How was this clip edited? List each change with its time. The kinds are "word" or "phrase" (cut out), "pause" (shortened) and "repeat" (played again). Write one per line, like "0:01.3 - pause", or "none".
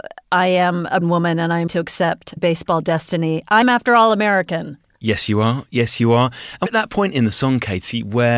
0:01.0 - word
0:01.7 - word
0:02.4 - word
0:03.6 - word
0:06.7 - word